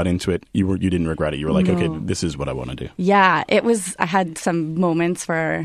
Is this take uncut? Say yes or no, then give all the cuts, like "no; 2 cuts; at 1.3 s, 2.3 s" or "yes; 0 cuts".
yes; 0 cuts